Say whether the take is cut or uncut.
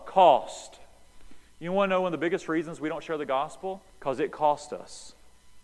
cut